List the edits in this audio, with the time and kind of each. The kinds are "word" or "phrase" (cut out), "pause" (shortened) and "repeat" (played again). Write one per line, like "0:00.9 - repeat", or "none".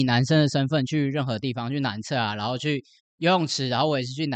0:03.0 - pause